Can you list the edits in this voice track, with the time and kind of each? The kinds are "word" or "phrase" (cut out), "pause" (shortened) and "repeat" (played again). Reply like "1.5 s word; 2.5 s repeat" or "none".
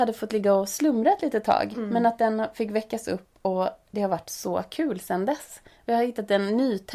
none

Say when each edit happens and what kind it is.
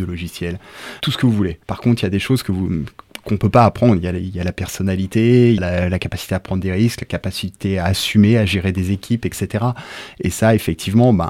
1.0 s word; 1.6 s pause; 5.6 s phrase

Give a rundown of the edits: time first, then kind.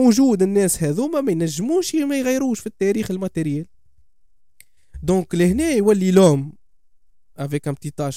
none

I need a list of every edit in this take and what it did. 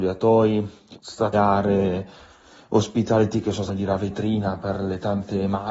0.9 s word; 1.3 s phrase; 3.7 s phrase

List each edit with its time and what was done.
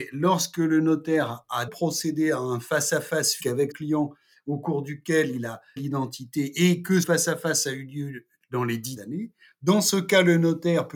1.7 s word; 3.4 s word; 3.7 s word; 5.8 s word; 7.0 s word; 9.0 s word

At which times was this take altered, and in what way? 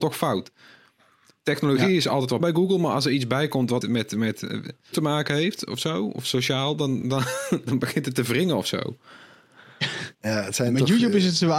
2.4 s word; 3.8 s word; 4.9 s word; 7.0 s word; 10.1 s pause

